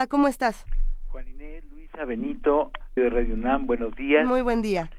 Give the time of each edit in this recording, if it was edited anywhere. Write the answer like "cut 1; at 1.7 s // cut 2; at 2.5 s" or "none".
cut 1; at 3.0 s